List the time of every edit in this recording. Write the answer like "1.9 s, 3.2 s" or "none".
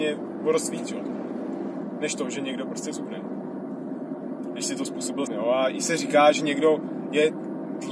5.3 s

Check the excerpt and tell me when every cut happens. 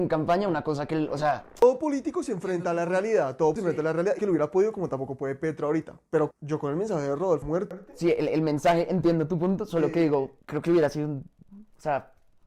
3.6 s, 4.2 s, 6.3 s, 7.4 s, 10.4 s

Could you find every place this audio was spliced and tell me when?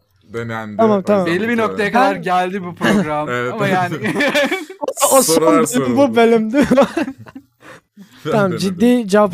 none

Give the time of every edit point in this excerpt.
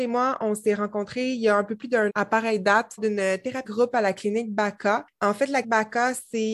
2.1 s, 3.0 s, 3.6 s, 5.6 s

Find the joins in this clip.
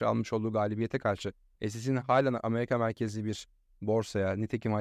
none

